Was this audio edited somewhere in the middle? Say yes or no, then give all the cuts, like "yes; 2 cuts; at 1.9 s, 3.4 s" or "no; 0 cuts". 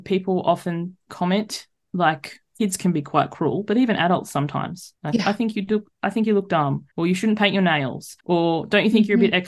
yes; 4 cuts; at 2.5 s, 5.0 s, 6.9 s, 8.2 s